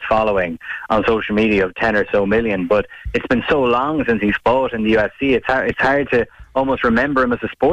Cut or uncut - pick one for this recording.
uncut